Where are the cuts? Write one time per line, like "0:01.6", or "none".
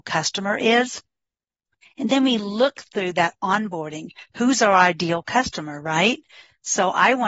none